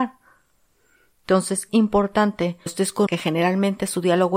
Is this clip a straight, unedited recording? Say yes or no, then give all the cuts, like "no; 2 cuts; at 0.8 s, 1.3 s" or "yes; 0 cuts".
no; 3 cuts; at 1.7 s, 2.7 s, 3.1 s